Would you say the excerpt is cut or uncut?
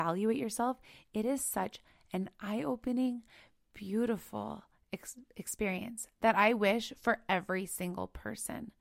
uncut